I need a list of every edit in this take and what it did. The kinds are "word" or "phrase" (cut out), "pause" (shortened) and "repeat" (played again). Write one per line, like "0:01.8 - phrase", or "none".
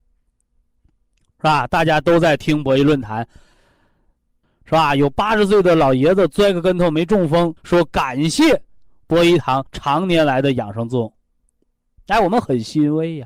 0:07.6 - pause
0:09.7 - pause